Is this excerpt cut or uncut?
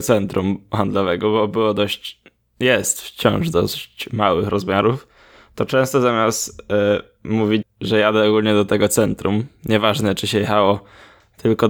cut